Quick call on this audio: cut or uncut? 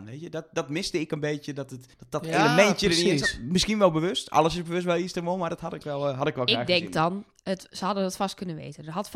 cut